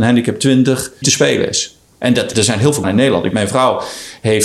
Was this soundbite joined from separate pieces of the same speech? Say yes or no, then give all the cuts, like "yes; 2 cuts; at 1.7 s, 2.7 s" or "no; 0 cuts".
yes; 5 cuts; at 1.0 s, 1.9 s, 2.3 s, 2.8 s, 3.3 s